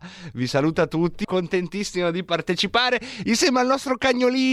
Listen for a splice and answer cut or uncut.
cut